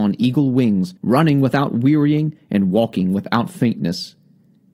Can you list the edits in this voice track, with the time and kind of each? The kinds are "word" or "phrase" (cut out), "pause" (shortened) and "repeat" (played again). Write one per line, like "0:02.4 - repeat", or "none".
0:01.0 - pause